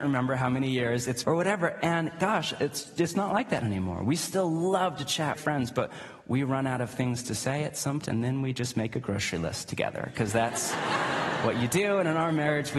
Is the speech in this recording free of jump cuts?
no; 3 cuts; at 1.2 s, 5.3 s, 8.0 s

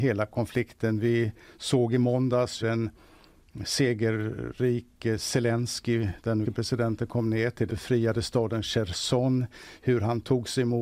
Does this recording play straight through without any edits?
no; 3 cuts; at 2.6 s, 6.4 s, 7.7 s

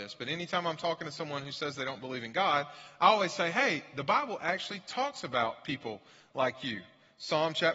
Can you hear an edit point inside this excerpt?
no; 0 cuts

